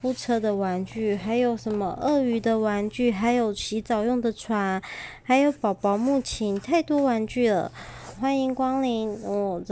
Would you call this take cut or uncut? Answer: cut